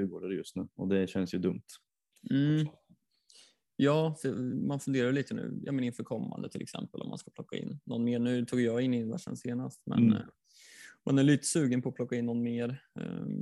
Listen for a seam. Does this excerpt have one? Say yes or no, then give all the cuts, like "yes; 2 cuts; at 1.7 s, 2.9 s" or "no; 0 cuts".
no; 0 cuts